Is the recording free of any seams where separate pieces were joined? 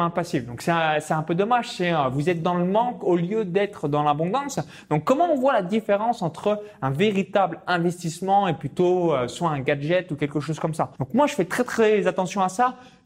no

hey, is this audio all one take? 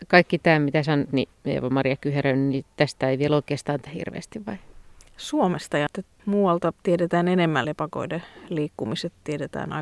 no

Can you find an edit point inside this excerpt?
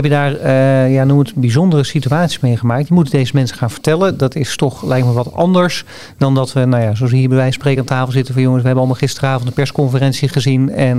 no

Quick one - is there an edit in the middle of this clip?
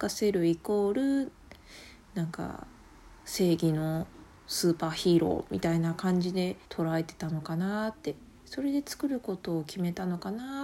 yes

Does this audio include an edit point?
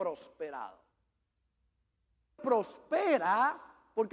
yes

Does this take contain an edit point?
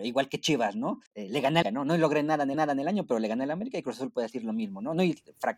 yes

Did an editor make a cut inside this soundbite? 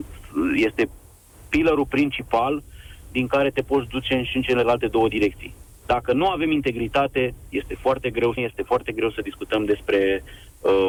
yes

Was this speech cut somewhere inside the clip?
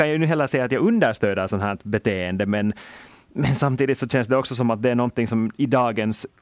no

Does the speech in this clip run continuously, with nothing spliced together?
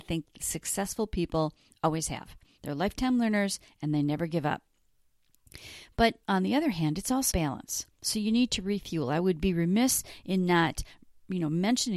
no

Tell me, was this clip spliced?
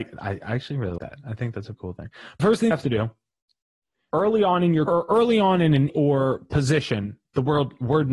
yes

